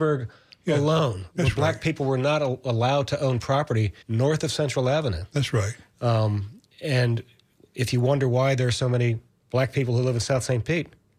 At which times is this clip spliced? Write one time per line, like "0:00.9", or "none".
0:04.0
0:06.7
0:09.3